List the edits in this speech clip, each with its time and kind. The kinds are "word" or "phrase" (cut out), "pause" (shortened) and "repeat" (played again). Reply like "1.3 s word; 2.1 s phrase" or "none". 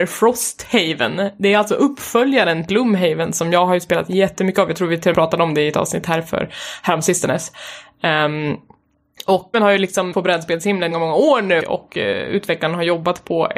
2.7 s word; 5.1 s word; 9.5 s word; 10.1 s word; 10.9 s word; 11.6 s word